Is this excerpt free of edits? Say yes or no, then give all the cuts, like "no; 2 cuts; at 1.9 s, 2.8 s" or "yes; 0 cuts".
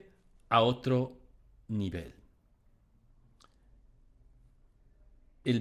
yes; 0 cuts